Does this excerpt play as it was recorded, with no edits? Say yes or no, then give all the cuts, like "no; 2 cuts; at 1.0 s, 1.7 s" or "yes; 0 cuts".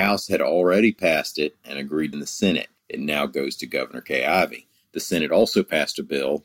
no; 1 cut; at 2.1 s